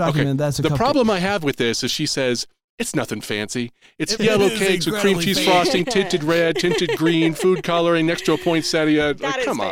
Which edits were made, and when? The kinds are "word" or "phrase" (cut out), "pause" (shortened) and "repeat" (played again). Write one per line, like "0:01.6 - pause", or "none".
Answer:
0:04.2 - word